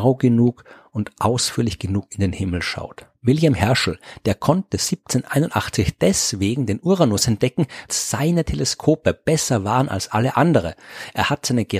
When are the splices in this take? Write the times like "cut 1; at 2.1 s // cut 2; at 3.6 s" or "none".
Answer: cut 1; at 7.9 s